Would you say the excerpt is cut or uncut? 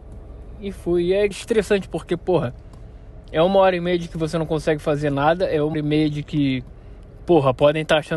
cut